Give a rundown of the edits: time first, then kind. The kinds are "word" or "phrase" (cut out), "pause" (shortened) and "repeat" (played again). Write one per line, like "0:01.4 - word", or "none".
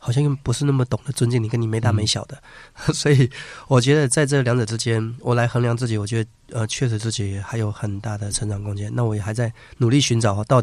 none